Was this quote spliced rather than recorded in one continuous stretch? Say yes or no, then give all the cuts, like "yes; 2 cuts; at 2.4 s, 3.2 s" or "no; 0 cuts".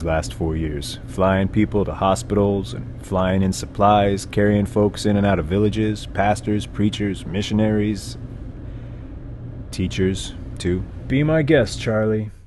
no; 0 cuts